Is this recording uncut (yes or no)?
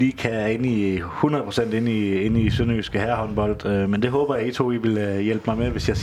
yes